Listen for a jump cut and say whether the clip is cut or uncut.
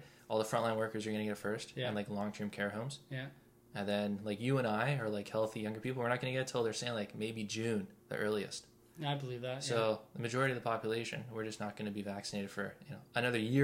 cut